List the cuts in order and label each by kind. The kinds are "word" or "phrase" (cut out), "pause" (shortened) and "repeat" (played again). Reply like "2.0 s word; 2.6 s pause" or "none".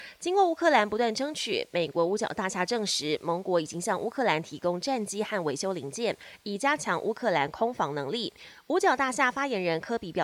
none